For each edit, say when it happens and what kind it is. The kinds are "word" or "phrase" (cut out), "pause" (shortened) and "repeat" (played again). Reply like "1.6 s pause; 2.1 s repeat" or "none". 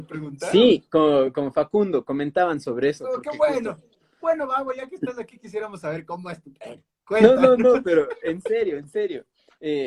none